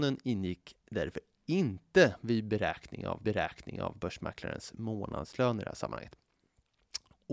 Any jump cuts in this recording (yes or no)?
yes